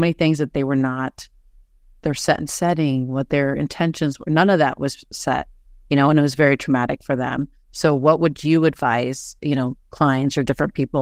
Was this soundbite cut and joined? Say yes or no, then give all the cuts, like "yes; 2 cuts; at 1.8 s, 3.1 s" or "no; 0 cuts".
yes; 1 cut; at 9.4 s